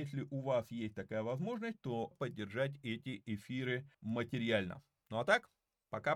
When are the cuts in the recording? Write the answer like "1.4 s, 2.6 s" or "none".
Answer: 2.1 s, 3.9 s